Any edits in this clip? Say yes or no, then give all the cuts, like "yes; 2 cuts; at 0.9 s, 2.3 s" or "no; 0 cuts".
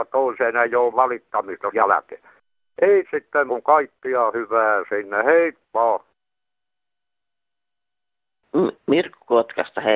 yes; 4 cuts; at 0.9 s, 1.7 s, 3.0 s, 3.5 s